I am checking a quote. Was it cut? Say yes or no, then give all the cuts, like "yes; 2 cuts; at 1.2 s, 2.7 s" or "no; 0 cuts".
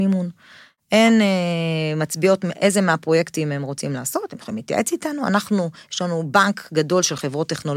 no; 0 cuts